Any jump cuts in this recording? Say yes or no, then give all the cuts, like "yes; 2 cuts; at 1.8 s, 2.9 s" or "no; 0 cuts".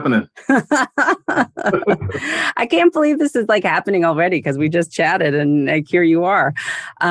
no; 0 cuts